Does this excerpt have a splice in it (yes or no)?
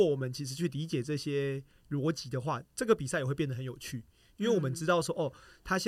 no